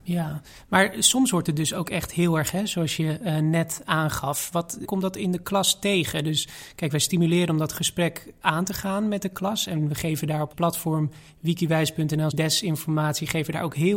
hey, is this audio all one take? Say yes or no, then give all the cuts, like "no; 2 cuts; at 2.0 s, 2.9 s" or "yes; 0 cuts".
no; 4 cuts; at 2.5 s, 4.8 s, 10.5 s, 12.3 s